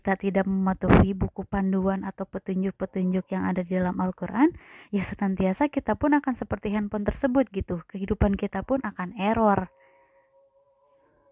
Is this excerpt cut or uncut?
uncut